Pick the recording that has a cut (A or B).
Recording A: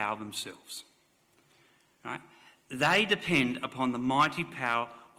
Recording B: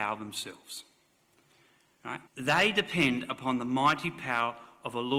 B